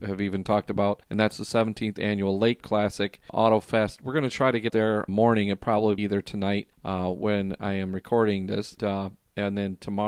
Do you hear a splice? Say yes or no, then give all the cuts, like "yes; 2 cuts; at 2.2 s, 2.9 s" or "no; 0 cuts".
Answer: yes; 8 cuts; at 1.0 s, 2.6 s, 3.3 s, 4.7 s, 5.1 s, 6.0 s, 6.7 s, 8.8 s